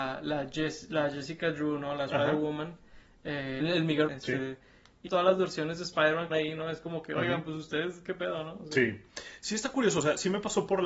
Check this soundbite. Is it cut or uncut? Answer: cut